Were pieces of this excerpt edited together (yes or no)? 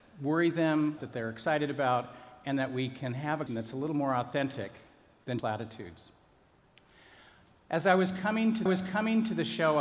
yes